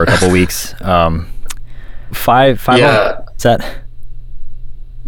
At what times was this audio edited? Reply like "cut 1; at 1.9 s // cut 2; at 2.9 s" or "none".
cut 1; at 2.1 s // cut 2; at 3.4 s